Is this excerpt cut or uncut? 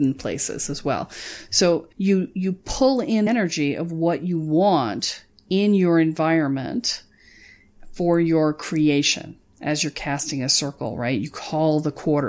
cut